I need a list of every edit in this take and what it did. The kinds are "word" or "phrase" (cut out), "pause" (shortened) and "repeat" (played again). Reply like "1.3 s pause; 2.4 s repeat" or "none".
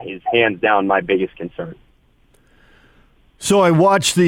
none

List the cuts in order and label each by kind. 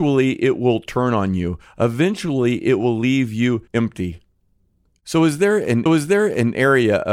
3.7 s pause; 5.9 s repeat

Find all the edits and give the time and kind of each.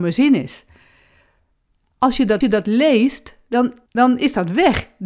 2.4 s repeat; 3.9 s pause

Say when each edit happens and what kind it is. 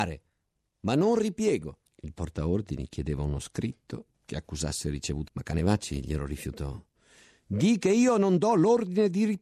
1.9 s pause; 4.1 s pause; 5.3 s word

